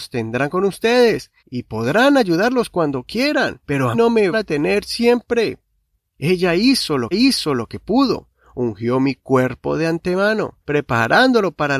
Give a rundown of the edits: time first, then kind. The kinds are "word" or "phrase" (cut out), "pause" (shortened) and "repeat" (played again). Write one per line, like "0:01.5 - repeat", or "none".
0:01.4 - pause
0:03.6 - pause
0:03.9 - word
0:04.3 - word
0:07.1 - repeat
0:10.6 - pause